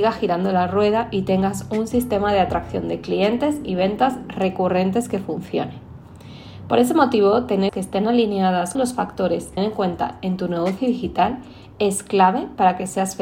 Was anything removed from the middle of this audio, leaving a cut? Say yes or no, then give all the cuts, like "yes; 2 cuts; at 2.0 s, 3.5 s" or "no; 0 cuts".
yes; 3 cuts; at 7.7 s, 8.8 s, 9.6 s